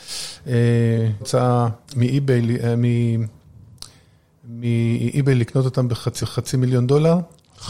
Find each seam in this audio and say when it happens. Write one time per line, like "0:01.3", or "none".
0:01.2
0:01.8
0:06.2